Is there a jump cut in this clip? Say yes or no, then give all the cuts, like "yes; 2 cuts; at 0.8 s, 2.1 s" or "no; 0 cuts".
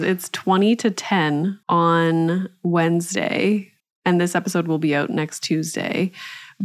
yes; 2 cuts; at 1.6 s, 3.8 s